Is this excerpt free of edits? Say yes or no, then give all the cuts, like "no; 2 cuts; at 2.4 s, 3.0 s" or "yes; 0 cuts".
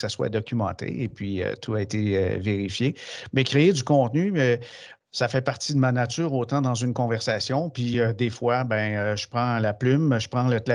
yes; 0 cuts